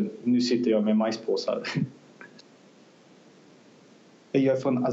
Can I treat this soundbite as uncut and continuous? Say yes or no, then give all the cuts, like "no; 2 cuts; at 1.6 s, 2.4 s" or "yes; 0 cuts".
yes; 0 cuts